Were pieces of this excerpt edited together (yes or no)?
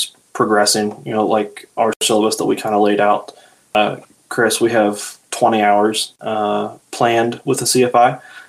no